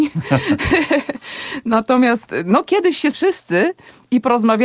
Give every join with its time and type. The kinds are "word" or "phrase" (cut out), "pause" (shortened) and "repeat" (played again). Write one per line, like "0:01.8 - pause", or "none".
0:03.1 - word